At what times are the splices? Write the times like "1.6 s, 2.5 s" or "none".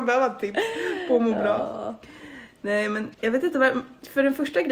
3.1 s